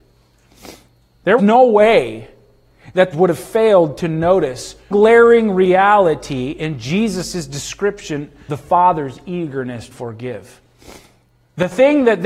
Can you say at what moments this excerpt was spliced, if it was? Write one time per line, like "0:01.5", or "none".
0:01.4
0:03.1
0:04.9
0:08.5
0:09.9